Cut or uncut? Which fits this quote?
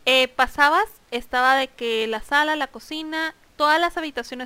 uncut